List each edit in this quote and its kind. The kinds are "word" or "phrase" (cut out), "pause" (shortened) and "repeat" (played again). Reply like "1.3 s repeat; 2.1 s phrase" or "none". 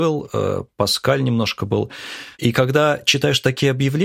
2.3 s pause